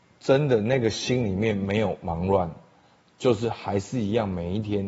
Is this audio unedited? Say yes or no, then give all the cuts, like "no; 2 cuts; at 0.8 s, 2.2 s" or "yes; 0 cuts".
yes; 0 cuts